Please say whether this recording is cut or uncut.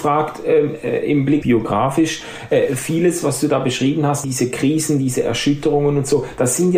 cut